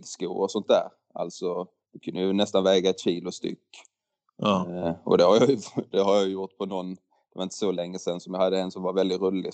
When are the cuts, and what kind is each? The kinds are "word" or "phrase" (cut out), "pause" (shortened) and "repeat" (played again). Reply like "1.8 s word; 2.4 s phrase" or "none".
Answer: none